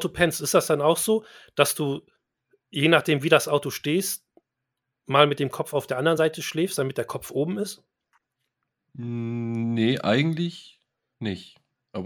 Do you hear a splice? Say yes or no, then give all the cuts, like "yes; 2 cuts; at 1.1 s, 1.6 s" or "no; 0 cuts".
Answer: no; 0 cuts